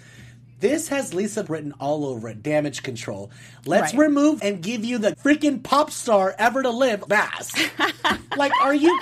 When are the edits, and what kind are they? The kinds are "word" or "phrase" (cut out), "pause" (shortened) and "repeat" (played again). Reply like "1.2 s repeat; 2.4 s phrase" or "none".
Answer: 1.4 s word; 4.4 s word; 5.1 s word; 7.1 s word